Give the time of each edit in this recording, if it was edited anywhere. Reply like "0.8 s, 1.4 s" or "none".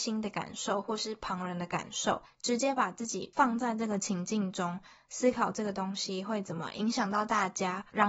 none